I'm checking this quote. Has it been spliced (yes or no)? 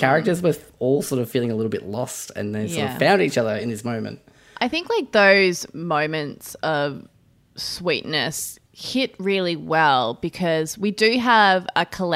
no